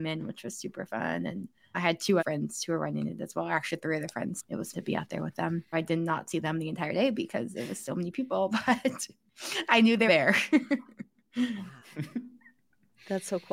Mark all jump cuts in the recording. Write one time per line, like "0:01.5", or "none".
0:02.2
0:04.7
0:05.7
0:10.1